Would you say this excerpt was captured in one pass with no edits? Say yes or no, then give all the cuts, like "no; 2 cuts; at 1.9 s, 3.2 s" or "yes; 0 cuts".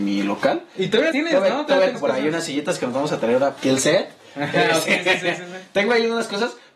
no; 4 cuts; at 1.1 s, 1.9 s, 3.6 s, 4.9 s